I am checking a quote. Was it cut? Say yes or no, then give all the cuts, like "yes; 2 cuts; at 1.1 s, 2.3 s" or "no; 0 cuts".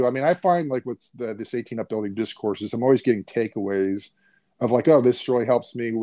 no; 0 cuts